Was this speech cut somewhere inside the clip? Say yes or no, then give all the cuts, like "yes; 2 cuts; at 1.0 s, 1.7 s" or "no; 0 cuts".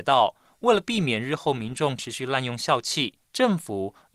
yes; 1 cut; at 3.2 s